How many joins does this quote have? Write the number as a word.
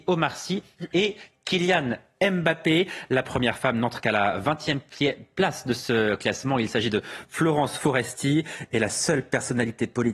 zero